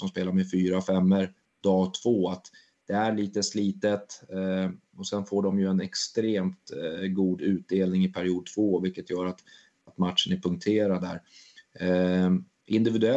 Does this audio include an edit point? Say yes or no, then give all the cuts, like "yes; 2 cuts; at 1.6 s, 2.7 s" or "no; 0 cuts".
no; 0 cuts